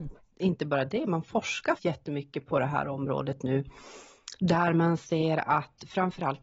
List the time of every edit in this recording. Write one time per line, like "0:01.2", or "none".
0:01.8